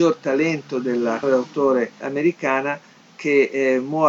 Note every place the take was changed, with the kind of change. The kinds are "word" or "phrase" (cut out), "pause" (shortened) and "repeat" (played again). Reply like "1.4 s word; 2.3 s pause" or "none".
1.2 s word; 2.0 s word